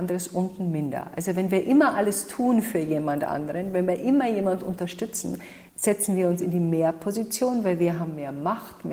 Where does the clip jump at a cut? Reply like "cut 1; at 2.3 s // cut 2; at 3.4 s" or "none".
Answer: cut 1; at 5.7 s